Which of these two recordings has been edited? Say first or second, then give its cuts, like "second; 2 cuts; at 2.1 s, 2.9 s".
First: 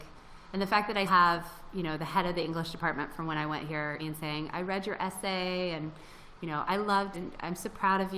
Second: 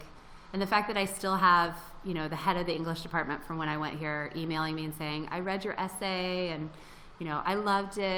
first; 3 cuts; at 1.1 s, 4.0 s, 7.1 s